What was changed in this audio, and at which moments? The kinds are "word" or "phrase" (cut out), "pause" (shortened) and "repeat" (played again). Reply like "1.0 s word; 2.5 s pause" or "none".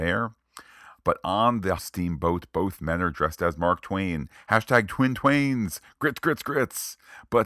1.8 s word